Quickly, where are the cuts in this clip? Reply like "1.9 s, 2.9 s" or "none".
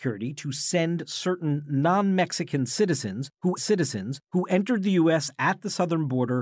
3.6 s

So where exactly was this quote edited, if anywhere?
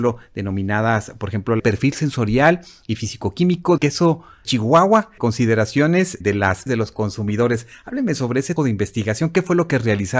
1.6 s, 3.8 s, 4.4 s, 5.2 s, 6.2 s, 6.7 s, 8.6 s

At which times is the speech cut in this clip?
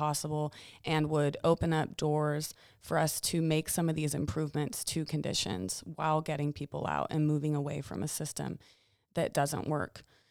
none

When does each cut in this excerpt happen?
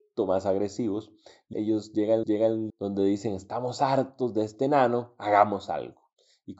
1.5 s, 2.2 s, 2.7 s

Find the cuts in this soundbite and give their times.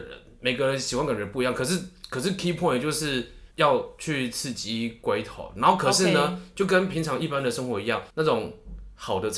3.5 s, 8.1 s

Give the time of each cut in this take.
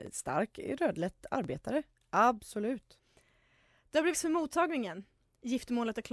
4.1 s

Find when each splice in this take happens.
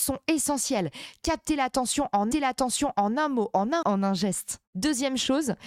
2.3 s, 3.8 s

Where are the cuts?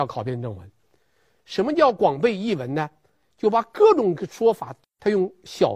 none

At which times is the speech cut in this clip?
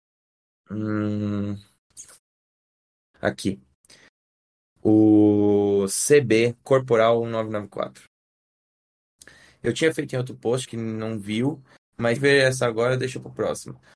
6.6 s, 10.6 s, 12.2 s

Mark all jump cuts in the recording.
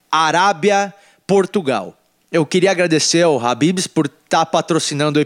none

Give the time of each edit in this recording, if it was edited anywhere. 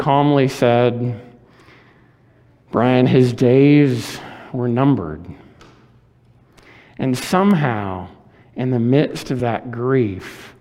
none

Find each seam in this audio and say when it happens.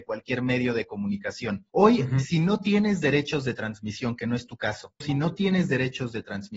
1.7 s, 5.0 s

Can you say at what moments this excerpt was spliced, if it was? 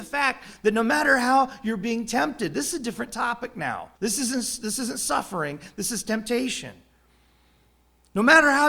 3.9 s

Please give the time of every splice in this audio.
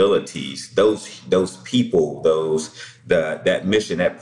none

